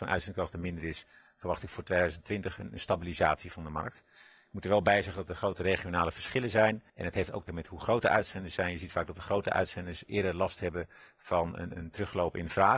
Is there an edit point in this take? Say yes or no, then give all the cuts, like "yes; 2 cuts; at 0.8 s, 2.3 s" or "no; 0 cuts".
yes; 3 cuts; at 6.9 s, 7.5 s, 11.7 s